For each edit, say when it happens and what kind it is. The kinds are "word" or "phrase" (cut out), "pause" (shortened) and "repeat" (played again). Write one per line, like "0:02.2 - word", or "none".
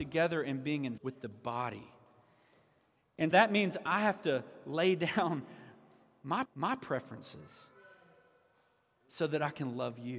0:01.0 - word
0:03.3 - word
0:06.5 - repeat